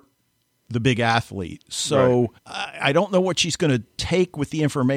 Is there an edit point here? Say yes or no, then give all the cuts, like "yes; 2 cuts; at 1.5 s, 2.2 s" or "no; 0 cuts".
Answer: yes; 1 cut; at 2.4 s